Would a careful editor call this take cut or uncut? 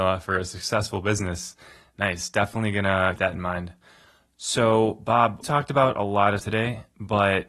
cut